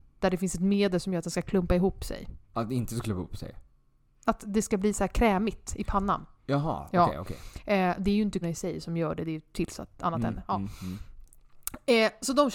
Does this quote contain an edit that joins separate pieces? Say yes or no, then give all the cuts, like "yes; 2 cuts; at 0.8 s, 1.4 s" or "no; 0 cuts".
yes; 3 cuts; at 2.4 s, 4.3 s, 8.4 s